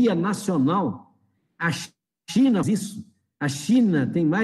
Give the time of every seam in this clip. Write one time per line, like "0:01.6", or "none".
0:02.6